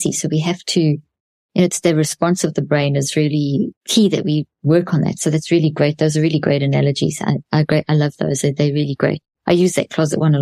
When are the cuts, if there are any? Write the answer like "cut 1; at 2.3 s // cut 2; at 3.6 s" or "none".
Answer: cut 1; at 3.8 s